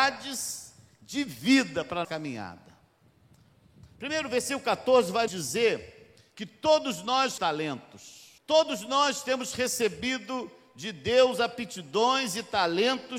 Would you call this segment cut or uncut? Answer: cut